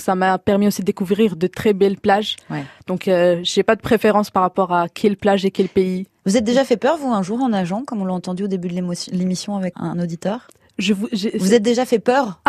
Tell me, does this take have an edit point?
yes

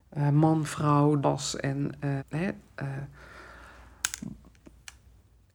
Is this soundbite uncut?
no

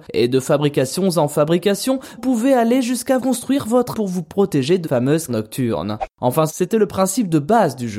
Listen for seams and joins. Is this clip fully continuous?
no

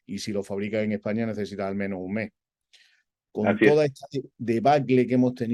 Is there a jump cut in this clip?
no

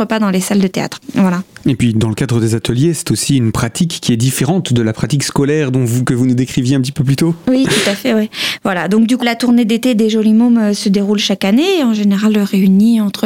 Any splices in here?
yes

